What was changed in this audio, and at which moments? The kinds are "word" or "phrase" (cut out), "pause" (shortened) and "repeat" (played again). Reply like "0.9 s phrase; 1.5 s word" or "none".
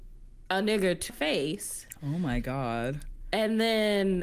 1.1 s word